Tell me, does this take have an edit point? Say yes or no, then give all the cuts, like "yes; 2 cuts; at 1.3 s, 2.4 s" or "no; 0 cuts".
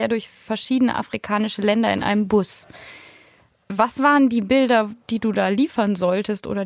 no; 0 cuts